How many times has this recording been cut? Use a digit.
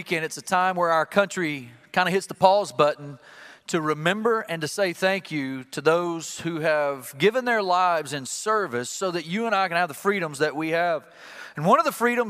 0